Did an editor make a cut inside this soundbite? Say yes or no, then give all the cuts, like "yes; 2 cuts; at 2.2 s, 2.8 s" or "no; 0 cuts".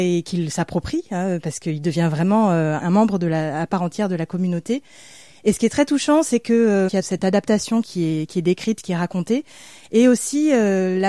no; 0 cuts